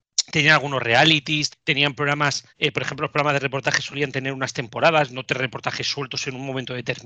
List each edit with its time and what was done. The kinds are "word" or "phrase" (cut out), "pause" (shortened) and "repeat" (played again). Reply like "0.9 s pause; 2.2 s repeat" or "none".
1.5 s word; 2.5 s pause